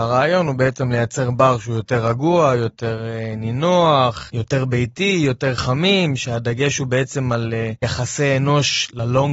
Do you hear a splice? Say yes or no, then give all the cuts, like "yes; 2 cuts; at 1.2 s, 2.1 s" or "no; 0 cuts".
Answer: no; 0 cuts